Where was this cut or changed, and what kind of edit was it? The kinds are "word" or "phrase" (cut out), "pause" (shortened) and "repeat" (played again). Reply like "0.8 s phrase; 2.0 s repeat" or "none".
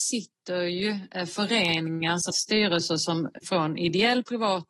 2.3 s phrase; 3.4 s word